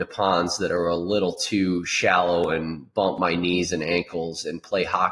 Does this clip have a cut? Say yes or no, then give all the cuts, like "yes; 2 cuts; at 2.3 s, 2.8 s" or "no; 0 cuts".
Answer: no; 0 cuts